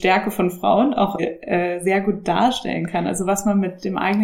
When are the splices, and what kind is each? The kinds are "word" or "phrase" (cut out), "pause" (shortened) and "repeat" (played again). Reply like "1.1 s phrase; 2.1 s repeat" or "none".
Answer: 1.2 s word